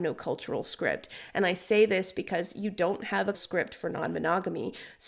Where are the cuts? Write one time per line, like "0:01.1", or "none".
0:03.3